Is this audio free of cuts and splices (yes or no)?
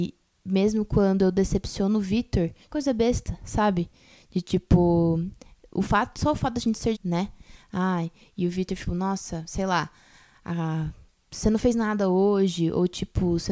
no